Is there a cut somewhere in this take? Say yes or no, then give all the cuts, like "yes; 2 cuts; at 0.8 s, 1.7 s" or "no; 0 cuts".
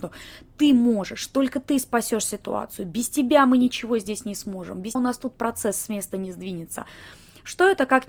yes; 1 cut; at 5.0 s